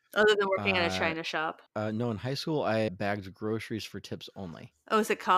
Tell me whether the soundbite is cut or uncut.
cut